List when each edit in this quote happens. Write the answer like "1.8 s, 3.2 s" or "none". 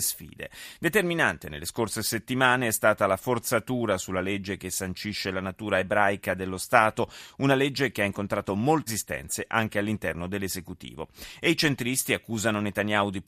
8.9 s